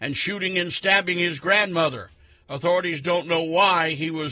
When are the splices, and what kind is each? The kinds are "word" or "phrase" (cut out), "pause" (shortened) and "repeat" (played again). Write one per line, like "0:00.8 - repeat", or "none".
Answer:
none